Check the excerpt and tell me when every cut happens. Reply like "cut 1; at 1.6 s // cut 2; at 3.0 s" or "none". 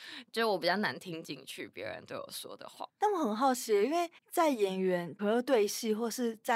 cut 1; at 4.2 s

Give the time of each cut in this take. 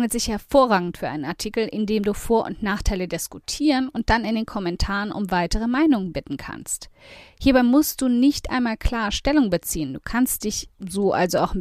none

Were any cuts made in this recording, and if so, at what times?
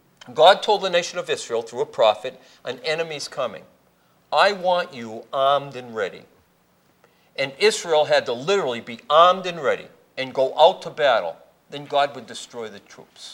none

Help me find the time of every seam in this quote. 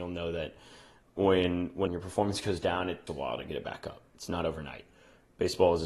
cut 1; at 1.9 s // cut 2; at 3.1 s

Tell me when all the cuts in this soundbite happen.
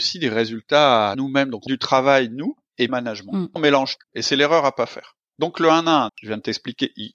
cut 1; at 1.1 s // cut 2; at 1.7 s // cut 3; at 2.9 s // cut 4; at 3.6 s // cut 5; at 4.0 s // cut 6; at 6.1 s

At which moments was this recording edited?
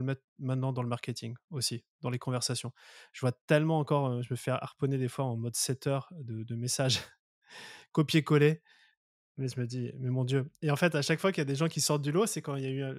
none

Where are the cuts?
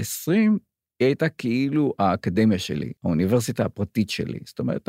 cut 1; at 3.0 s

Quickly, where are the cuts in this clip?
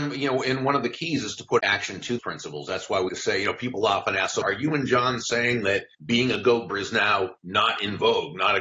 cut 1; at 1.6 s // cut 2; at 2.2 s // cut 3; at 3.1 s // cut 4; at 4.4 s // cut 5; at 5.9 s // cut 6; at 6.7 s // cut 7; at 7.4 s

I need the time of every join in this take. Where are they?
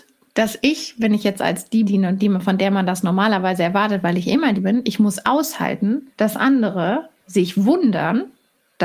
cut 1; at 1.9 s // cut 2; at 4.5 s // cut 3; at 6.1 s // cut 4; at 7.2 s

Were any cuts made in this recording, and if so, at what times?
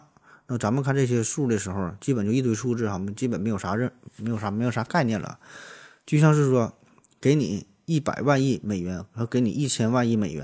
none

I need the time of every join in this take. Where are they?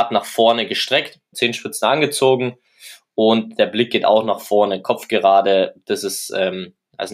cut 1; at 1.3 s

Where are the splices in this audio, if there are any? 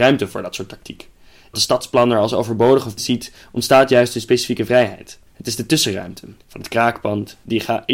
cut 1; at 1.5 s // cut 2; at 3.0 s // cut 3; at 5.3 s // cut 4; at 6.4 s

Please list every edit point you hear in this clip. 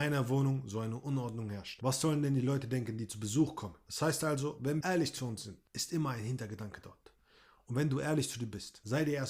cut 1; at 4.8 s // cut 2; at 5.7 s

